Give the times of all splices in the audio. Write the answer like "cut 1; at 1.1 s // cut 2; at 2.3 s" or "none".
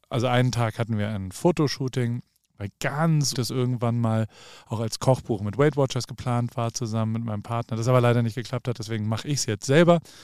cut 1; at 3.3 s